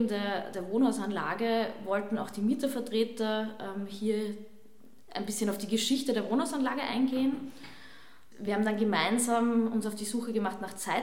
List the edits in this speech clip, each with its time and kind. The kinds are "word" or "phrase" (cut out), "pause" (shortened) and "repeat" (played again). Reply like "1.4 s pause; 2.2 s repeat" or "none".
none